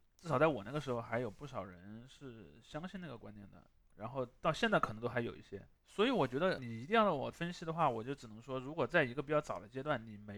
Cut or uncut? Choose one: uncut